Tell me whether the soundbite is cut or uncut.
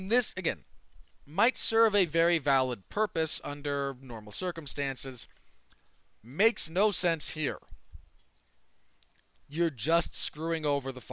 uncut